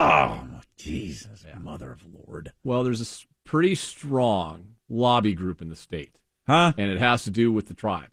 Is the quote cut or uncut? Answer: cut